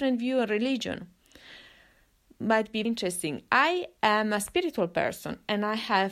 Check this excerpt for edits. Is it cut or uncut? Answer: cut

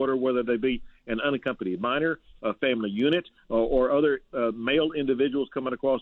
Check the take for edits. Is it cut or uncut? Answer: uncut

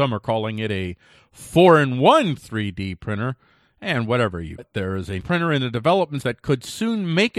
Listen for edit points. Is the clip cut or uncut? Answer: cut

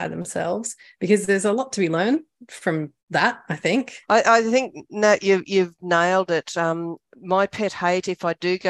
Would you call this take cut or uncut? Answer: cut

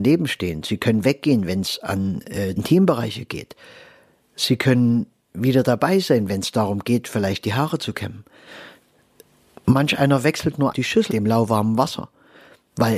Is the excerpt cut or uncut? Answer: cut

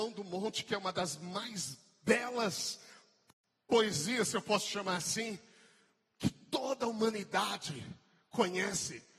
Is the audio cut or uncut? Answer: uncut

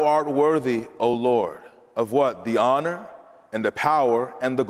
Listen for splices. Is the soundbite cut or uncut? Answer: uncut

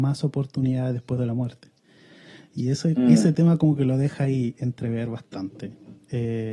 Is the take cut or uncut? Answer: uncut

